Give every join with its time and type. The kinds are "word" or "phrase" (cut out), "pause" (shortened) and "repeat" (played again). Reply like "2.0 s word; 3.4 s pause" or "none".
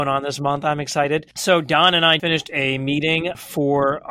1.3 s pause; 2.2 s word